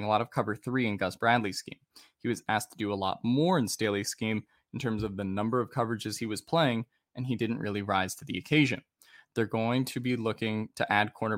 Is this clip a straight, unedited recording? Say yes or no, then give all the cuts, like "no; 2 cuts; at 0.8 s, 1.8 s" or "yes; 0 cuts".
yes; 0 cuts